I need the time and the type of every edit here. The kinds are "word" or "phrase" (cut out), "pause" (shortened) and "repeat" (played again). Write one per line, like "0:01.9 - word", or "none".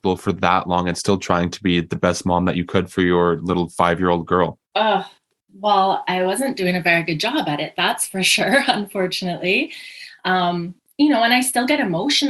0:04.6 - pause